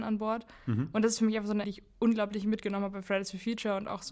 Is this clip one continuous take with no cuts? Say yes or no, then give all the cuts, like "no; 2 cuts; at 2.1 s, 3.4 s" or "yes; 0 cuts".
no; 1 cut; at 1.6 s